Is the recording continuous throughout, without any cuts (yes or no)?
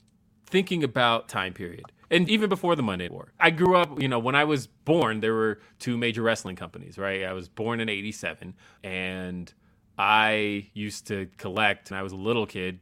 no